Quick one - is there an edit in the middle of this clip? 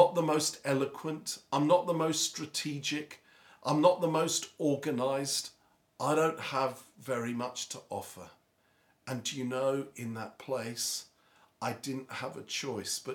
no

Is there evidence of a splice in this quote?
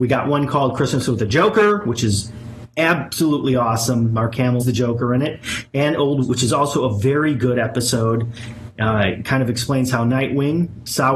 yes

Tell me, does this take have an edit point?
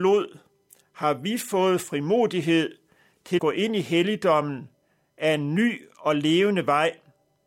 yes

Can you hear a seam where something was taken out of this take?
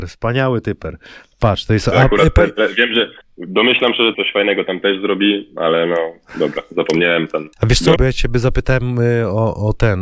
yes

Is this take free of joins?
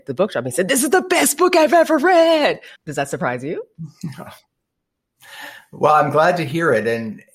no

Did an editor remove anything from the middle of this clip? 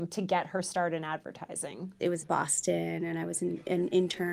yes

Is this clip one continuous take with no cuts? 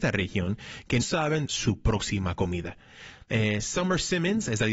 no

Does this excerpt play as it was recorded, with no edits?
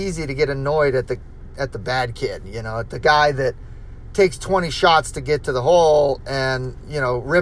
yes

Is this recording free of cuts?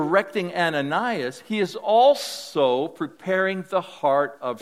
yes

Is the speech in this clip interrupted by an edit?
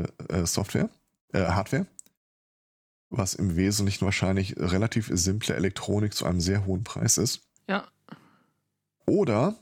no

